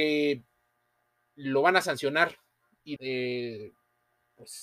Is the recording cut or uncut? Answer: cut